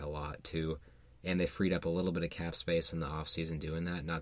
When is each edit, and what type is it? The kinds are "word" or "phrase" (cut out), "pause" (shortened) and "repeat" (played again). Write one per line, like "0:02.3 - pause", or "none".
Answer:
none